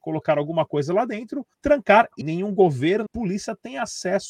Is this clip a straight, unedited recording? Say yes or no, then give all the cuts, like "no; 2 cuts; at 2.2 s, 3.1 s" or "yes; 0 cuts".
no; 3 cuts; at 1.5 s, 2.2 s, 3.1 s